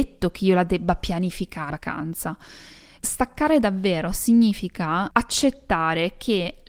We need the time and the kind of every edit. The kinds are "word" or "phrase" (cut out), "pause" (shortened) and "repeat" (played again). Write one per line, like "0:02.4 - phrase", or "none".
0:01.7 - word